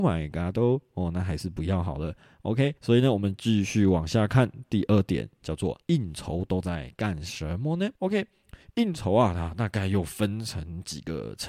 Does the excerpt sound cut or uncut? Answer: cut